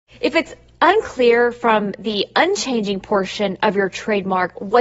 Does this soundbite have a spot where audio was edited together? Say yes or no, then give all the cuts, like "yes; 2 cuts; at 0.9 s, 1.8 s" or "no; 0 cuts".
no; 0 cuts